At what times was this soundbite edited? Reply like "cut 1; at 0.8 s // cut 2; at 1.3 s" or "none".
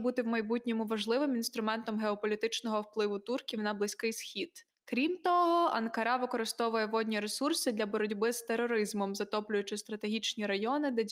none

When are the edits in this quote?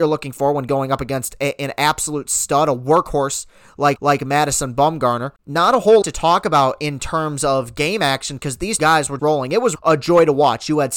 cut 1; at 4.0 s // cut 2; at 5.4 s // cut 3; at 6.0 s // cut 4; at 8.8 s // cut 5; at 9.2 s // cut 6; at 9.7 s

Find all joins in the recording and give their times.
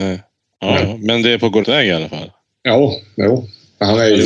cut 1; at 1.6 s

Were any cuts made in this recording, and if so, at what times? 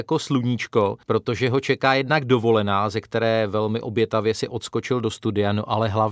cut 1; at 1.0 s

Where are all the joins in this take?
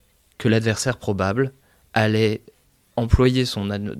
none

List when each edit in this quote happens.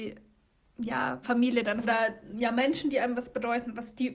cut 1; at 1.2 s // cut 2; at 1.8 s

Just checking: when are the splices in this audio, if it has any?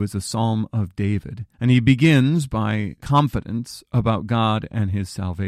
cut 1; at 1.5 s // cut 2; at 3.0 s

